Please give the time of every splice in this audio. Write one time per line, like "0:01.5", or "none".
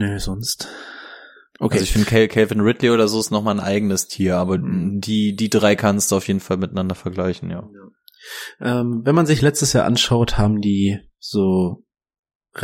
none